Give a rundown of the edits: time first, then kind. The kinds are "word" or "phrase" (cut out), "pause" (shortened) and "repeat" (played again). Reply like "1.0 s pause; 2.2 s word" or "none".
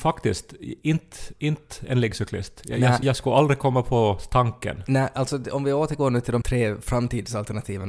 3.0 s word; 6.4 s word